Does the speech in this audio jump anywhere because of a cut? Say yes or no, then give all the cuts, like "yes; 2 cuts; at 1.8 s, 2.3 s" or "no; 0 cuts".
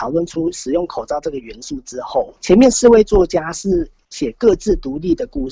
yes; 1 cut; at 2.4 s